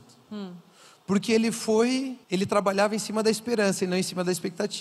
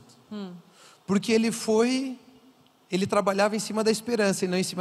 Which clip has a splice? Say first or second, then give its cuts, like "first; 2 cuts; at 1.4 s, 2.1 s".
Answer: first; 1 cut; at 2.2 s